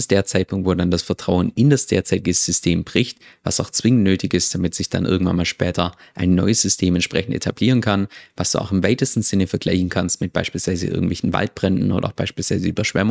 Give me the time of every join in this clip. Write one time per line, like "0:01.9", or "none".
none